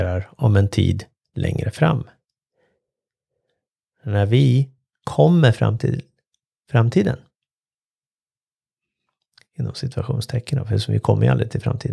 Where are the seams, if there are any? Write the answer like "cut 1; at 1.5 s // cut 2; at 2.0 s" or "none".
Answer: none